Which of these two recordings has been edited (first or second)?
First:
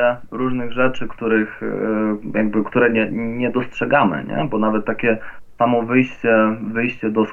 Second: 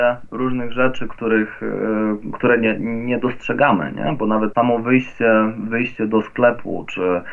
second